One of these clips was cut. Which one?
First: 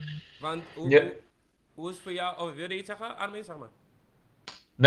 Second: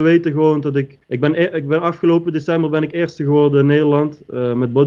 second; 1 cut; at 1.0 s

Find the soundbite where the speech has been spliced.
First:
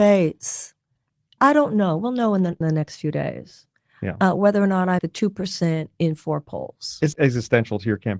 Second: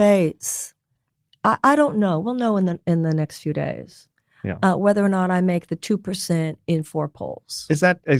first; 4 cuts; at 1.4 s, 2.6 s, 5.0 s, 7.1 s

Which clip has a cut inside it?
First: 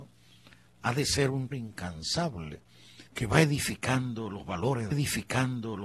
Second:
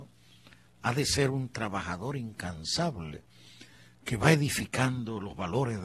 first; 3 cuts; at 1.5 s, 3.1 s, 4.9 s

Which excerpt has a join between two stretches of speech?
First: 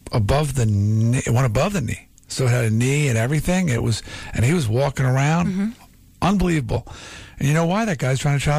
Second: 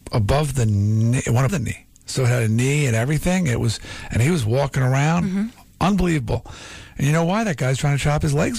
second; 2 cuts; at 1.5 s, 5.7 s

